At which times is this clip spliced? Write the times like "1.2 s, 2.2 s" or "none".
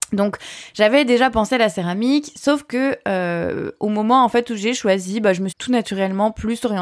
5.5 s